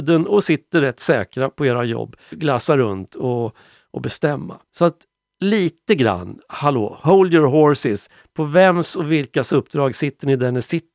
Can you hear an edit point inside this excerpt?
yes; 2 cuts; at 2.3 s, 4.7 s

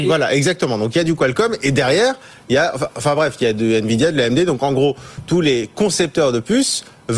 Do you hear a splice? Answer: no; 0 cuts

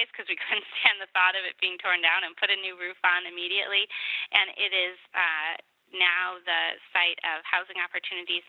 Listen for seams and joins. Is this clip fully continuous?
yes; 0 cuts

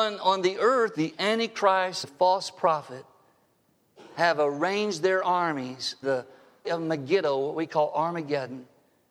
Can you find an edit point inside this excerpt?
yes; 4 cuts; at 0.9 s, 2.0 s, 6.0 s, 6.6 s

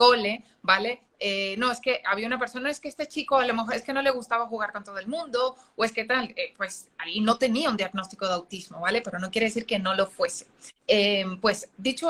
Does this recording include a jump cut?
yes; 1 cut; at 10.8 s

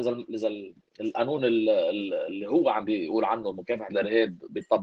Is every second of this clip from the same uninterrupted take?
yes; 0 cuts

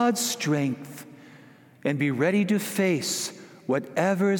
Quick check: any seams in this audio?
no; 0 cuts

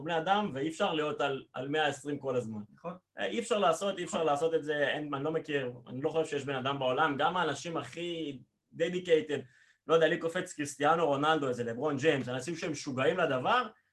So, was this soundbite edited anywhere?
no; 0 cuts

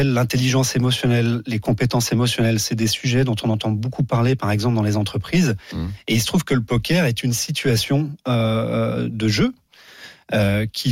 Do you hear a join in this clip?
no; 0 cuts

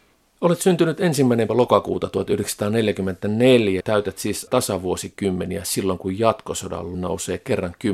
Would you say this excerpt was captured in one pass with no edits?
no; 4 cuts; at 1.5 s, 3.8 s, 4.5 s, 6.9 s

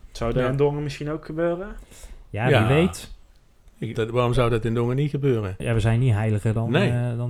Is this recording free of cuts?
no; 1 cut; at 3.9 s

